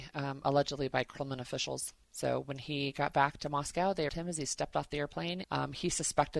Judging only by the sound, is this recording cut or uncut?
cut